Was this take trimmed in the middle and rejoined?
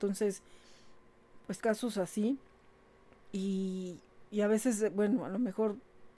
yes; 1 cut; at 1.6 s

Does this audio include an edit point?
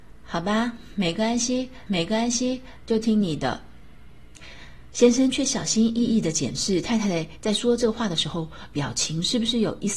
yes; 1 cut; at 1.9 s

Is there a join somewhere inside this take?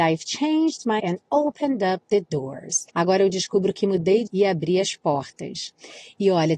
yes; 3 cuts; at 1.0 s, 2.9 s, 4.3 s

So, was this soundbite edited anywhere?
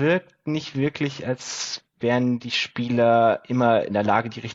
no; 0 cuts

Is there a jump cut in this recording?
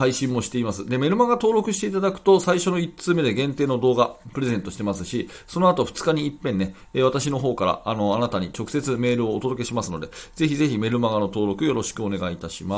no; 0 cuts

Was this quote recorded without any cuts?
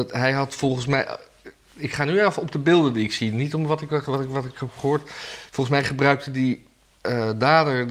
yes; 0 cuts

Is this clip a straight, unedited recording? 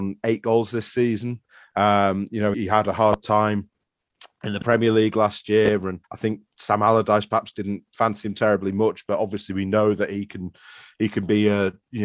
no; 2 cuts; at 2.5 s, 6.0 s

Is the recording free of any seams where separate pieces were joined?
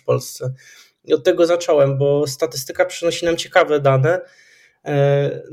yes; 0 cuts

